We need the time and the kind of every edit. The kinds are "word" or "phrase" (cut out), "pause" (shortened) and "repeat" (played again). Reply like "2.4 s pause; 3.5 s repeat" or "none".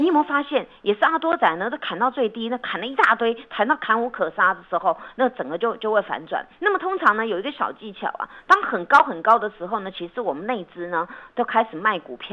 6.5 s pause